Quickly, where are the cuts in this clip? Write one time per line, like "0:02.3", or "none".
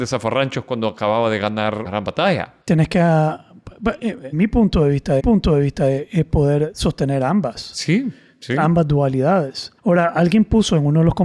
0:01.9
0:02.6
0:04.3
0:05.2
0:09.8